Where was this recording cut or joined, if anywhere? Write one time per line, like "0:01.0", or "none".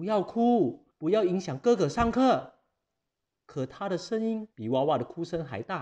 0:00.9
0:04.5